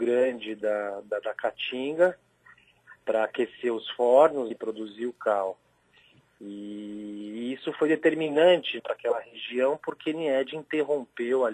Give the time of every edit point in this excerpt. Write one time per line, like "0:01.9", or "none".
0:04.5
0:08.8